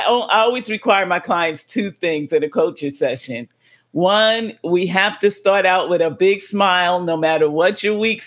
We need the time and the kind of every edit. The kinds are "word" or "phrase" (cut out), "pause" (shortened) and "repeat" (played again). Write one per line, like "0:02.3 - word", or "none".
none